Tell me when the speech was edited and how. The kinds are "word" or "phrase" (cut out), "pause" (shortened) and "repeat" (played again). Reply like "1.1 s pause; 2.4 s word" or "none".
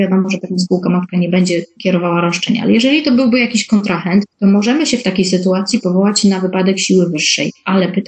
4.3 s pause